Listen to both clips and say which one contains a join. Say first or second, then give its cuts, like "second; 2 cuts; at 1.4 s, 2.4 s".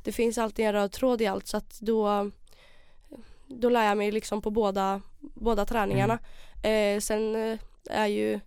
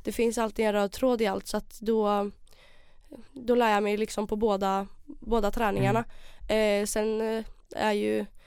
second; 1 cut; at 3.3 s